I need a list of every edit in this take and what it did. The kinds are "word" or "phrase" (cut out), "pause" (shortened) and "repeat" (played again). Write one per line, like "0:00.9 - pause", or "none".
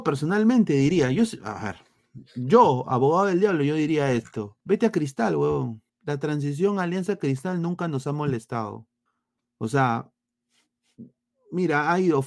0:04.6 - pause
0:05.9 - pause
0:09.1 - pause